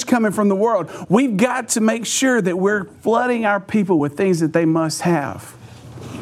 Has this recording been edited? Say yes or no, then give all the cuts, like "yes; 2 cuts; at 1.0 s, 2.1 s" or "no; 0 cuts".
no; 0 cuts